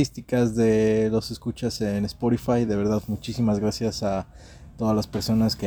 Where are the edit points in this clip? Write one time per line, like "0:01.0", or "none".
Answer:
none